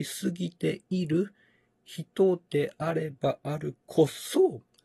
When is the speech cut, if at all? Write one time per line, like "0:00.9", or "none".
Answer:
none